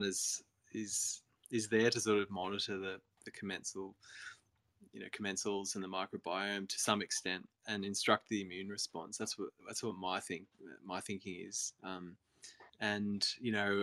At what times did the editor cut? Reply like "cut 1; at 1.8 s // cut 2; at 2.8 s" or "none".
cut 1; at 9.6 s // cut 2; at 12.7 s

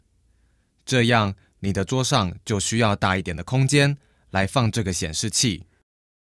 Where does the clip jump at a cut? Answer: none

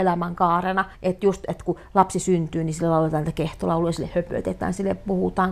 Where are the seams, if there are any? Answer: cut 1; at 0.9 s

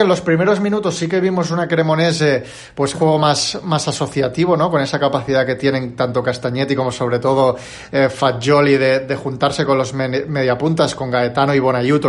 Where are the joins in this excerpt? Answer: cut 1; at 2.9 s

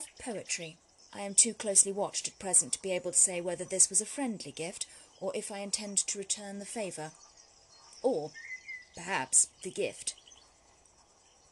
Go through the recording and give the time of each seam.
cut 1; at 1.0 s // cut 2; at 9.5 s

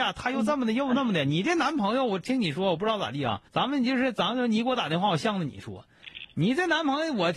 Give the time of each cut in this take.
cut 1; at 3.5 s

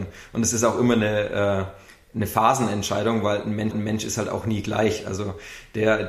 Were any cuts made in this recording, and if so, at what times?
cut 1; at 3.7 s

